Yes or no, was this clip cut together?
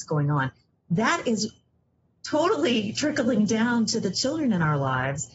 no